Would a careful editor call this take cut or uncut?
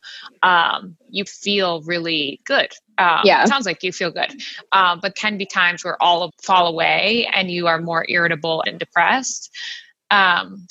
cut